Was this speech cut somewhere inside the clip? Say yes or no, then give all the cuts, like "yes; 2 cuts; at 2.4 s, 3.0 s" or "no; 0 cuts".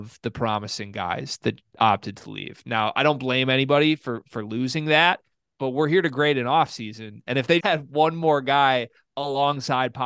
yes; 1 cut; at 7.6 s